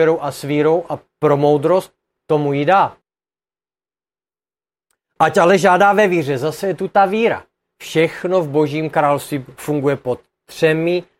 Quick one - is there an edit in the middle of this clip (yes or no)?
no